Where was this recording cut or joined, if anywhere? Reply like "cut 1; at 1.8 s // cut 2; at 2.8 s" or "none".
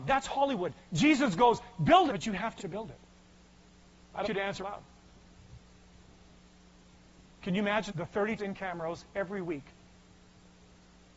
cut 1; at 2.1 s // cut 2; at 2.6 s // cut 3; at 4.2 s // cut 4; at 4.6 s // cut 5; at 7.9 s // cut 6; at 8.4 s

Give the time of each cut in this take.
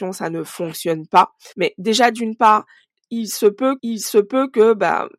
cut 1; at 1.5 s // cut 2; at 3.8 s

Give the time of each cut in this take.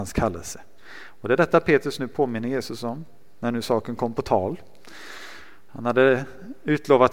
none

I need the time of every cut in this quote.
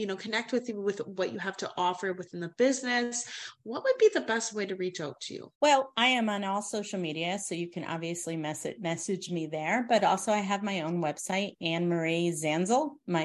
cut 1; at 5.5 s

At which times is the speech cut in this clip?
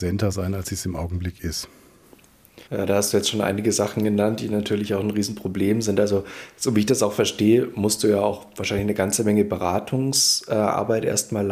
cut 1; at 2.7 s

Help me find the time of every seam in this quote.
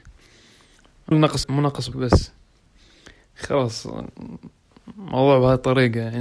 cut 1; at 1.1 s // cut 2; at 1.4 s // cut 3; at 1.9 s

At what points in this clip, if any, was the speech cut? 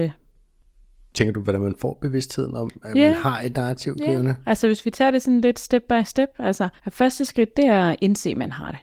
cut 1; at 6.8 s

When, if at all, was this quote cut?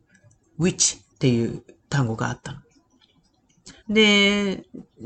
cut 1; at 1.1 s // cut 2; at 3.8 s

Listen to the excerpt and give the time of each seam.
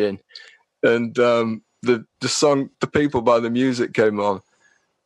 cut 1; at 2.7 s

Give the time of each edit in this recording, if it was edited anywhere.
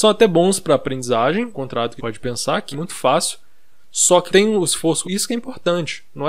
cut 1; at 1.5 s // cut 2; at 2.0 s // cut 3; at 2.7 s // cut 4; at 4.3 s // cut 5; at 5.0 s

